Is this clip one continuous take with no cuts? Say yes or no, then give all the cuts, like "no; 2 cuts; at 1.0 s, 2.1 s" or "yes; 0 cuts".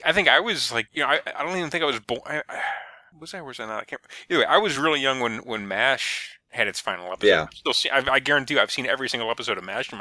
yes; 0 cuts